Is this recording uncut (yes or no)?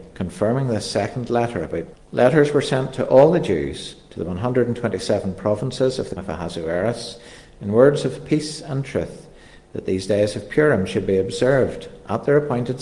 no